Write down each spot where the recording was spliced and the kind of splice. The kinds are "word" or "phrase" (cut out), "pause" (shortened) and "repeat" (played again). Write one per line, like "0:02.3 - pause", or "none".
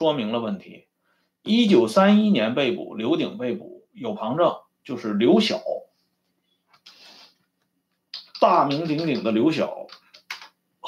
none

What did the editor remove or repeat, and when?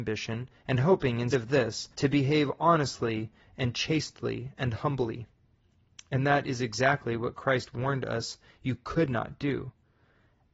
0:01.3 - word
0:01.9 - pause

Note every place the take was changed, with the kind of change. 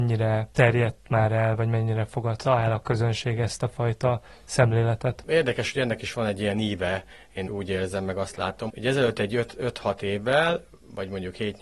0:07.4 - word
0:08.7 - word

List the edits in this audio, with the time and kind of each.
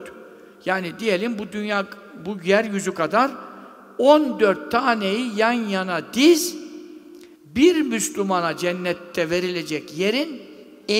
0:07.3 - pause

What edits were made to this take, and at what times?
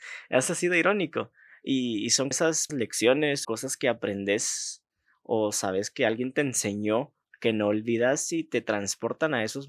0:02.3 - word
0:02.7 - word
0:03.4 - word

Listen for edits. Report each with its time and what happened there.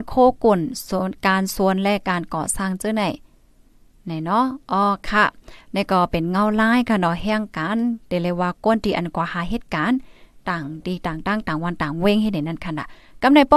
none

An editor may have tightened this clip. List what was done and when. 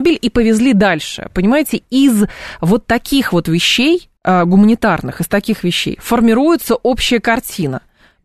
0:04.2 - pause

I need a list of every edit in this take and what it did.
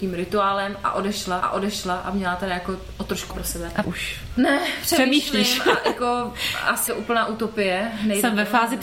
0:01.4 - repeat
0:03.3 - phrase
0:03.8 - phrase
0:06.9 - word

